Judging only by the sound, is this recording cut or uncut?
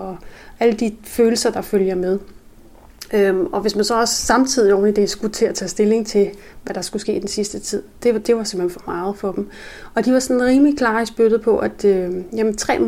uncut